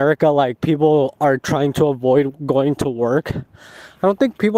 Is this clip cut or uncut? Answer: uncut